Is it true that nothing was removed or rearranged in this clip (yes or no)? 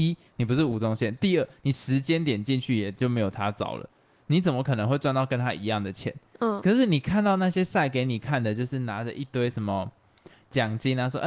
no